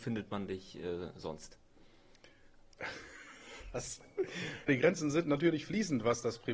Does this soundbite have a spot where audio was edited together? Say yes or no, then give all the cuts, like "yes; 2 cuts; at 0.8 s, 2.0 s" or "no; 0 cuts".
yes; 1 cut; at 4.7 s